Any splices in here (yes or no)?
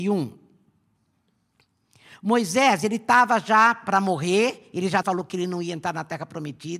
yes